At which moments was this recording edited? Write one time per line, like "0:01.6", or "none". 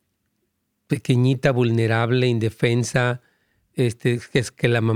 none